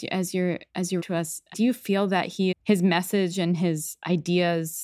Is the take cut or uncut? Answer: cut